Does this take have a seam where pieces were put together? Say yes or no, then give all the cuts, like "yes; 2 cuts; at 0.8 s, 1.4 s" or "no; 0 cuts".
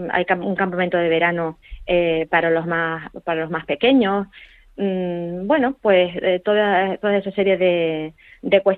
no; 0 cuts